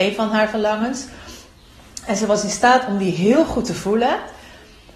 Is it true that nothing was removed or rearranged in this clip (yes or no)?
yes